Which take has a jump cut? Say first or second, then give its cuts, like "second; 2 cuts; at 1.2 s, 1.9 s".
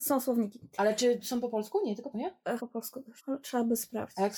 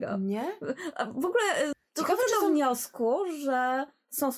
first; 3 cuts; at 2.1 s, 2.6 s, 3.2 s